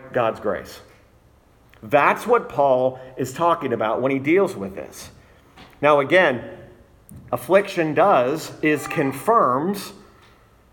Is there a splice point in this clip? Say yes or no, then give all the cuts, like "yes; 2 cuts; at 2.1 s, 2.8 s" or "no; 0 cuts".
yes; 1 cut; at 7.3 s